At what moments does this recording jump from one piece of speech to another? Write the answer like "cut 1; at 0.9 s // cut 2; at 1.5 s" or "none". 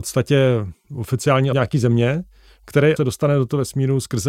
cut 1; at 1.5 s // cut 2; at 3.0 s